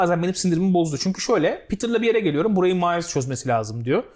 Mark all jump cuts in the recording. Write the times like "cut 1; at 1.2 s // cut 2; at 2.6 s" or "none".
none